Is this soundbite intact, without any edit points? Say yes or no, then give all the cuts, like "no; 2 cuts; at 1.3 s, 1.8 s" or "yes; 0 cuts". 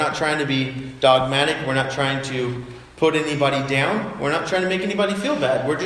yes; 0 cuts